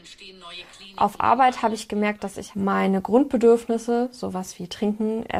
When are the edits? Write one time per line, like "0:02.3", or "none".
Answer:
none